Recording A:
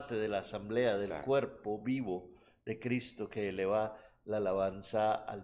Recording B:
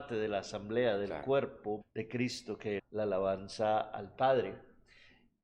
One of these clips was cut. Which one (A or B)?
B